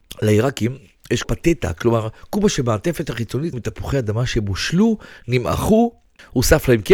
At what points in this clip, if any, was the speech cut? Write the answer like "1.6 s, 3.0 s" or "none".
1.2 s, 3.5 s